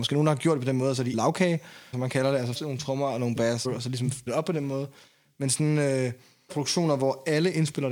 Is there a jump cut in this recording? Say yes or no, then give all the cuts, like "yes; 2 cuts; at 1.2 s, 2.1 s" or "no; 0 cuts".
yes; 6 cuts; at 1.1 s, 1.9 s, 2.5 s, 3.6 s, 4.3 s, 6.5 s